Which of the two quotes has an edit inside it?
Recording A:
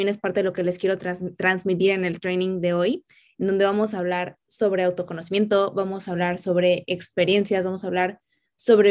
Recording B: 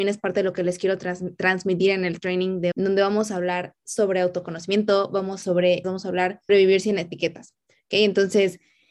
B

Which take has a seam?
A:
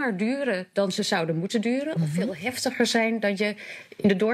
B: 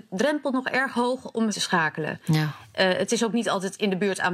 B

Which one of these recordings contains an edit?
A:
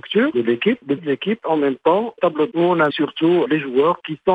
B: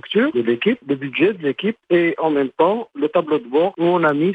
A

